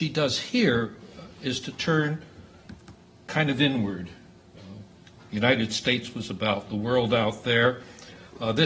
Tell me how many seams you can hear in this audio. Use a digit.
0